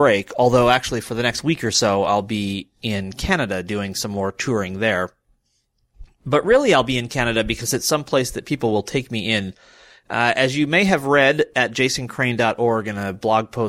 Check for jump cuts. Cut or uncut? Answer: uncut